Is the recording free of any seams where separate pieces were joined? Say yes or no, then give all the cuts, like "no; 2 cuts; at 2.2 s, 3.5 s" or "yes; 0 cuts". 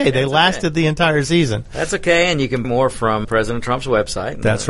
no; 2 cuts; at 2.6 s, 3.2 s